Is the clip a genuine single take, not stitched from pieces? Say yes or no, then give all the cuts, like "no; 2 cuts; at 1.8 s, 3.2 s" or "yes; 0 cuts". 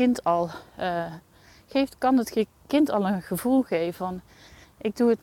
yes; 0 cuts